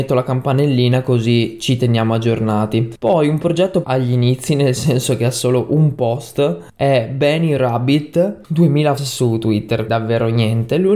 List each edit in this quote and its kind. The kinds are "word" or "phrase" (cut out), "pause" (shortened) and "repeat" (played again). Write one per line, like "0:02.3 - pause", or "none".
0:03.8 - word
0:09.0 - word
0:09.9 - word